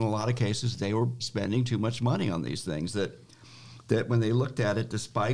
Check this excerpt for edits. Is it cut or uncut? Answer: uncut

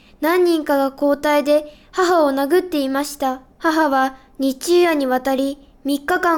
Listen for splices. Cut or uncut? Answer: cut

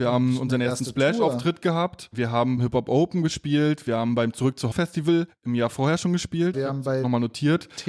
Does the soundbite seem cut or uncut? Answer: cut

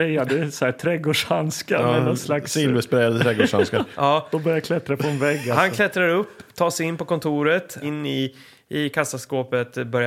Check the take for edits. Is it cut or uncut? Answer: uncut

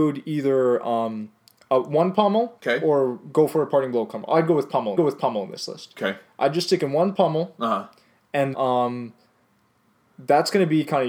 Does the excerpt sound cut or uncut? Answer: cut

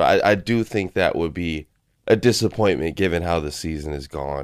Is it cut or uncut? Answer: uncut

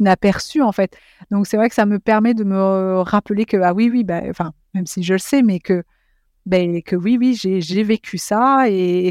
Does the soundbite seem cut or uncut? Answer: uncut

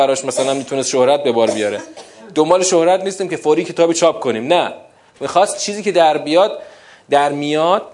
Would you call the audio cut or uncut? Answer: uncut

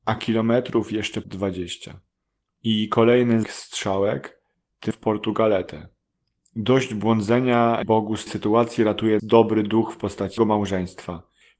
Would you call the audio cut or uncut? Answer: cut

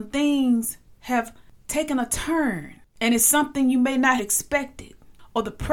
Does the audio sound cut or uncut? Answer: cut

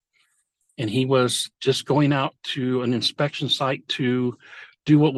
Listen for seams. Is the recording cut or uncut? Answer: cut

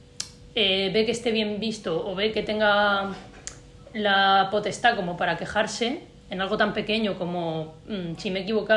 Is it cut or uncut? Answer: cut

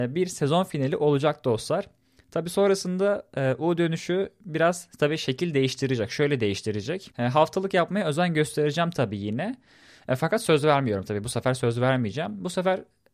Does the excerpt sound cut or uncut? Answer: uncut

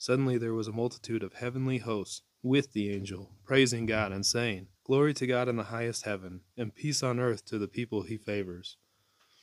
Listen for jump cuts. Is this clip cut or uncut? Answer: cut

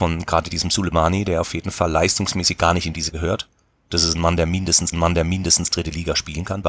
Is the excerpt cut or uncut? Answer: cut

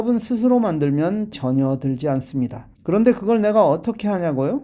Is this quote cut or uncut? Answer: cut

